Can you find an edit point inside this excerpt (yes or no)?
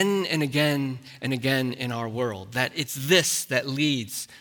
no